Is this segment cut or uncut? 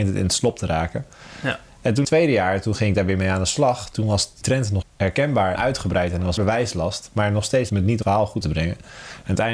cut